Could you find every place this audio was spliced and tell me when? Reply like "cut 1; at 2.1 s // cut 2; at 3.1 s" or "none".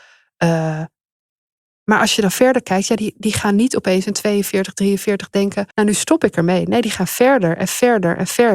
cut 1; at 5.7 s